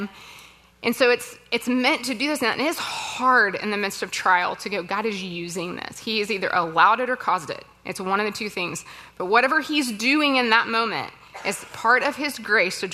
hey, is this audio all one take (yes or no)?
yes